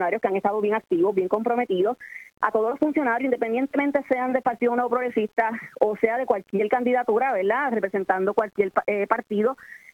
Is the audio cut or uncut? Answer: uncut